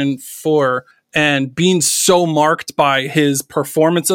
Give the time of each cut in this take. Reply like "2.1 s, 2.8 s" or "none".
0.9 s